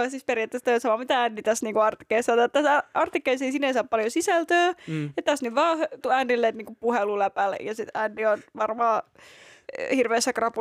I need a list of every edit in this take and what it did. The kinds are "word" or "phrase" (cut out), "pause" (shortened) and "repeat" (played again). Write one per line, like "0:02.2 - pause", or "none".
0:06.0 - word